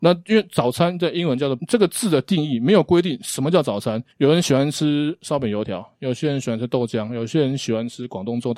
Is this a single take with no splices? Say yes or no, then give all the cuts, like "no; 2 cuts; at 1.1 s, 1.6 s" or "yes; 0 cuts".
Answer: no; 2 cuts; at 1.6 s, 4.1 s